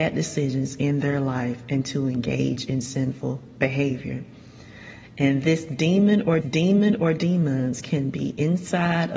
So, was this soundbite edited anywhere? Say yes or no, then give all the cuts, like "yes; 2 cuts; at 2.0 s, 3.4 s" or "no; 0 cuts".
yes; 1 cut; at 6.4 s